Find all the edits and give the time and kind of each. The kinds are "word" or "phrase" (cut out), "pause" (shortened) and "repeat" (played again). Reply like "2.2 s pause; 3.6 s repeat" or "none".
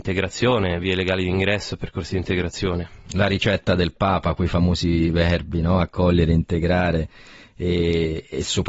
none